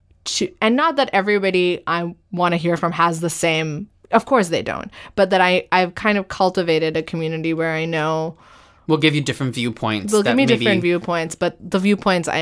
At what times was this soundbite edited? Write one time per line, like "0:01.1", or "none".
none